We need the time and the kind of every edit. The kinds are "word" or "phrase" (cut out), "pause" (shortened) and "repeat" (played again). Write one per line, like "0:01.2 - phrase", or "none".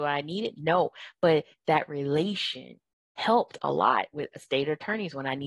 none